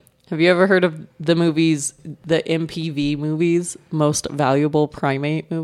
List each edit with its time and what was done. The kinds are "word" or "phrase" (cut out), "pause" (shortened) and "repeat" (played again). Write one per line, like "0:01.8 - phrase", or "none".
0:01.1 - pause